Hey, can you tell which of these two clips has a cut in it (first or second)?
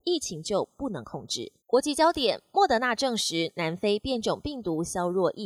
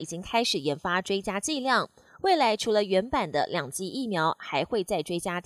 first